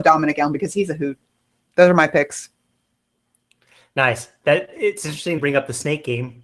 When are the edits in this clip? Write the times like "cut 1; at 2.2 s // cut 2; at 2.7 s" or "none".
cut 1; at 5.4 s